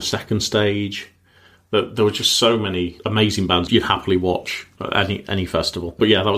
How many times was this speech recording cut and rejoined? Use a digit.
0